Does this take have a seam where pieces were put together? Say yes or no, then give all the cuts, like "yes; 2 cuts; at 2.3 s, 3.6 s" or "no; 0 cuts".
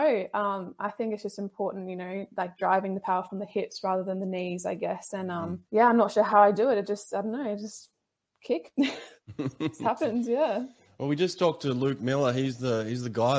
yes; 1 cut; at 5.7 s